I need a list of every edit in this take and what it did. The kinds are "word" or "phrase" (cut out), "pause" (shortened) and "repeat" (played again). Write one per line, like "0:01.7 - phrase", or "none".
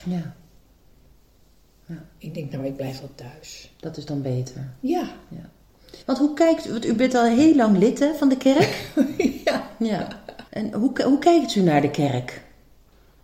0:06.0 - pause
0:10.5 - pause